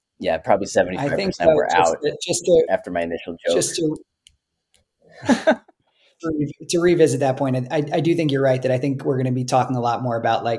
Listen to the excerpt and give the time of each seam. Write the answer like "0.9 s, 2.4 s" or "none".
6.2 s